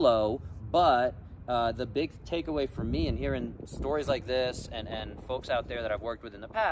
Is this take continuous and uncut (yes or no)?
yes